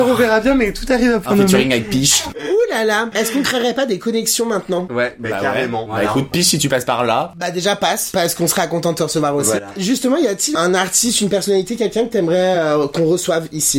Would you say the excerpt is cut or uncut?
uncut